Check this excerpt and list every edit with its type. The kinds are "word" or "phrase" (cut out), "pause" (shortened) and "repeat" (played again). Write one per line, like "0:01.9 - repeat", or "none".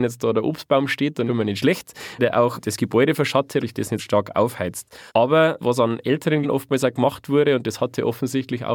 0:01.3 - phrase
0:02.2 - word
0:03.6 - phrase
0:04.0 - word
0:05.1 - pause
0:06.4 - word